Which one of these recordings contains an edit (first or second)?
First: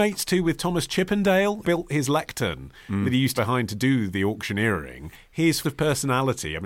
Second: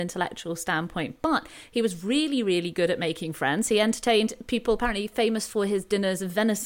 first